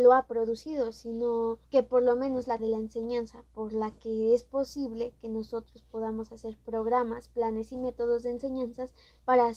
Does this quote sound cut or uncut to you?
cut